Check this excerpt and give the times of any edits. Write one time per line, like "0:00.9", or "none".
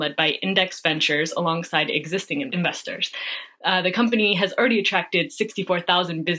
none